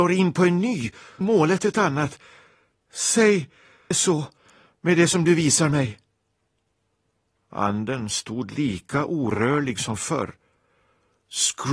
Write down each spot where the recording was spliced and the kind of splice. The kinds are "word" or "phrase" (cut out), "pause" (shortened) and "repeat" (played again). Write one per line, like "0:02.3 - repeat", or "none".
0:01.2 - phrase
0:03.9 - phrase